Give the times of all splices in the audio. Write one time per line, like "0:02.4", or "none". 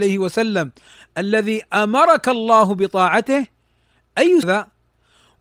0:04.4